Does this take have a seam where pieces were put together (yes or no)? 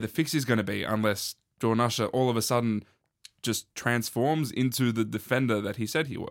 no